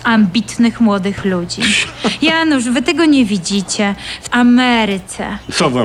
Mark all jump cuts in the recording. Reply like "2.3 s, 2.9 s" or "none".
4.3 s